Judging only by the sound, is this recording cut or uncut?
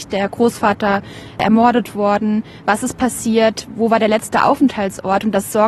uncut